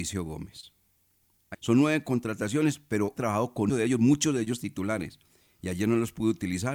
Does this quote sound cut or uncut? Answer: cut